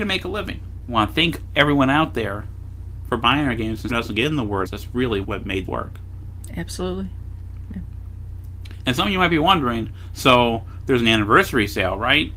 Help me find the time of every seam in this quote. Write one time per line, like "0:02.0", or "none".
0:03.9
0:04.7
0:05.2
0:05.7